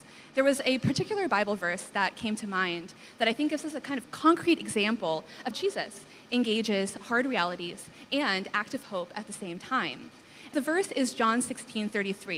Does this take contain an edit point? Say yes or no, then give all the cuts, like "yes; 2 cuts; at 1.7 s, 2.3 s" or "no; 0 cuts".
yes; 2 cuts; at 5.5 s, 10.5 s